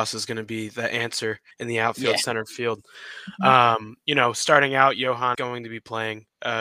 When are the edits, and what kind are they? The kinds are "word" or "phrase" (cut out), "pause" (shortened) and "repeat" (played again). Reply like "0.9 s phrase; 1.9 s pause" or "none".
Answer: 1.5 s pause; 5.3 s word